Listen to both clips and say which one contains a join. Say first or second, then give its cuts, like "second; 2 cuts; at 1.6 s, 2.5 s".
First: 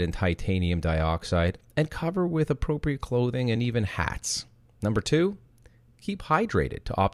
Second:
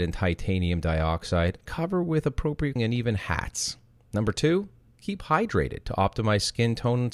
second; 3 cuts; at 1.7 s, 2.8 s, 4.9 s